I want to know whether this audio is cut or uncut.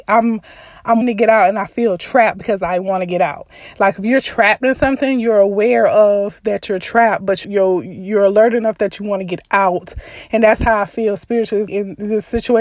cut